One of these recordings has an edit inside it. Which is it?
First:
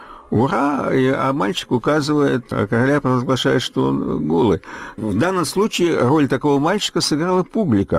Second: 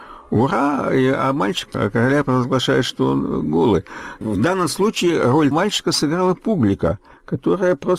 second; 2 cuts; at 1.7 s, 5.5 s

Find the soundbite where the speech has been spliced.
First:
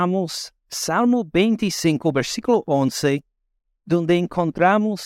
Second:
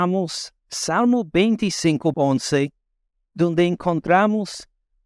second; 1 cut; at 2.1 s

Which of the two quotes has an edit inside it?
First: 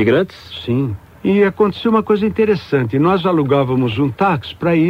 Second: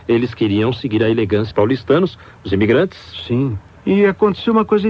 second; 1 cut; at 1.5 s

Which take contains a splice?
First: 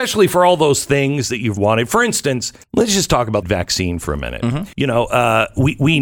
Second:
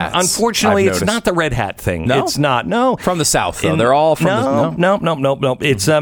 first; 4 cuts; at 1.6 s, 2.6 s, 3.4 s, 4.7 s

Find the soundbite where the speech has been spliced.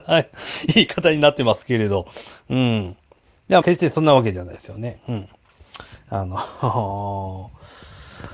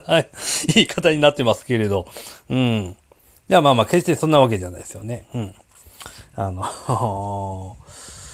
first; 1 cut; at 3.6 s

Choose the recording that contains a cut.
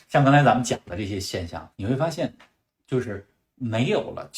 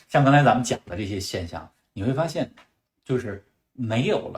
first; 1 cut; at 1.7 s

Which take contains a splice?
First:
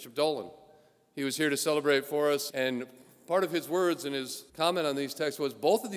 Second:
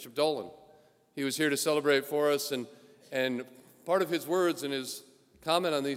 first; 2 cuts; at 2.5 s, 4.5 s

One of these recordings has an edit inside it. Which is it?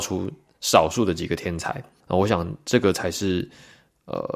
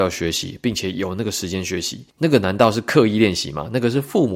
first; 1 cut; at 2.0 s

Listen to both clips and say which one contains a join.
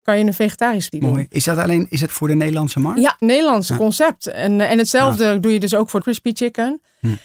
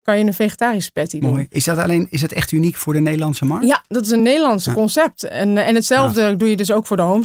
first; 4 cuts; at 0.9 s, 2.1 s, 3.2 s, 6.0 s

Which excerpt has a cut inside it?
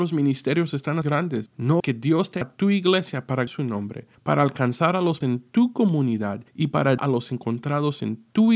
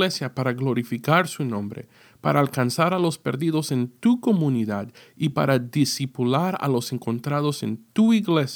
first; 8 cuts; at 1.0 s, 1.8 s, 2.4 s, 3.5 s, 4.1 s, 5.2 s, 6.5 s, 7.0 s

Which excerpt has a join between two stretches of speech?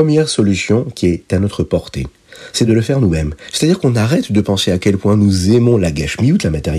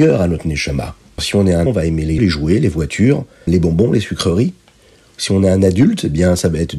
second; 4 cuts; at 1.2 s, 1.7 s, 2.2 s, 3.5 s

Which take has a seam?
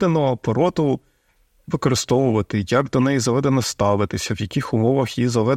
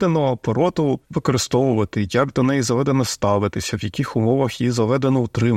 second; 1 cut; at 1.0 s

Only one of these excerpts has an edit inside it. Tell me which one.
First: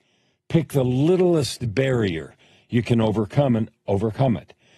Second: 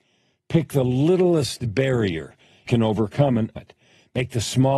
second; 2 cuts; at 2.7 s, 3.6 s

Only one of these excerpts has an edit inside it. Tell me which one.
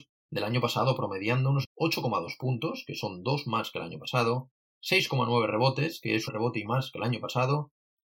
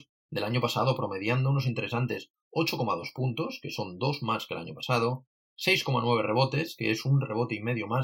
first; 3 cuts; at 1.6 s, 6.3 s, 6.6 s

